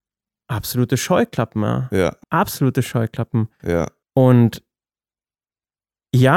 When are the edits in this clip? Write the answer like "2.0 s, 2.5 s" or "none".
2.2 s, 4.0 s